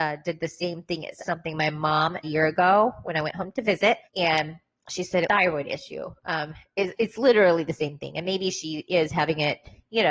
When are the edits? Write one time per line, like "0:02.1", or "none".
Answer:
0:01.2
0:02.2
0:04.0
0:05.2